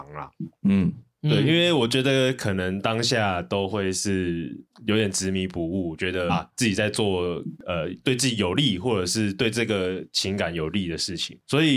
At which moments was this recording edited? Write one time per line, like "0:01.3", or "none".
0:06.3